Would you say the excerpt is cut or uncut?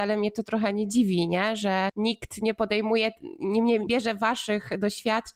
cut